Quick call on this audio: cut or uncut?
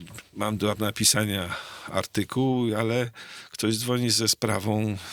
uncut